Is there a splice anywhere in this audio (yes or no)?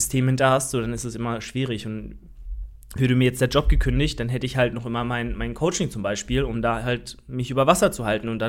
no